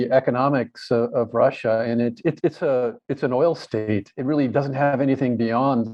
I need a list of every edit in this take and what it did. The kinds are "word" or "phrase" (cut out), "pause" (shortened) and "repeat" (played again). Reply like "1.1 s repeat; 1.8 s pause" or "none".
none